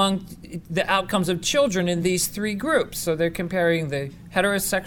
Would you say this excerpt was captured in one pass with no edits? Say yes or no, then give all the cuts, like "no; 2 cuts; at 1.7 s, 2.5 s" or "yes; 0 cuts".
yes; 0 cuts